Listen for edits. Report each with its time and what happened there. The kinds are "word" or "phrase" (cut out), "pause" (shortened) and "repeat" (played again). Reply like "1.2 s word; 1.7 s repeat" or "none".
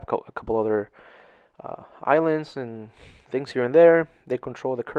none